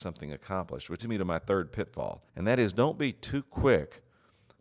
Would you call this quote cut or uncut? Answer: cut